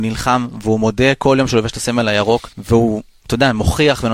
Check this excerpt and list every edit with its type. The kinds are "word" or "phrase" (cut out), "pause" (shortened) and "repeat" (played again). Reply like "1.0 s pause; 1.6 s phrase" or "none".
2.5 s pause